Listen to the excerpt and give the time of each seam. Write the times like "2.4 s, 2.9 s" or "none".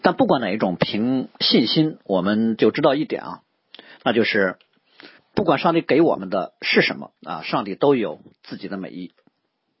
5.2 s, 7.2 s